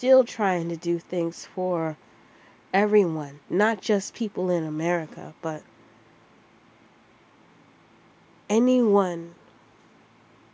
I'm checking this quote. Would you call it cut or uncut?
uncut